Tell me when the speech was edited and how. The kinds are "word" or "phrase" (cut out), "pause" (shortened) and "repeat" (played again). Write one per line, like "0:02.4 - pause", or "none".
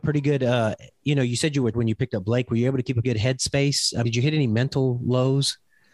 0:01.7 - word
0:03.0 - word
0:04.0 - word